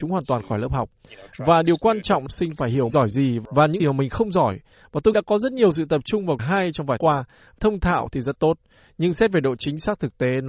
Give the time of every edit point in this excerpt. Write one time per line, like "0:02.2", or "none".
0:02.3
0:02.9
0:03.8
0:05.1
0:06.4
0:07.0
0:07.6